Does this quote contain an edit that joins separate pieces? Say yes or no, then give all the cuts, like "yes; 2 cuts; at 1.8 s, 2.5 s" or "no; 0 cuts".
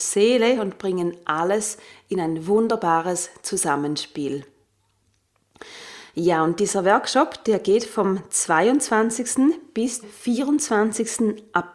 yes; 1 cut; at 10.0 s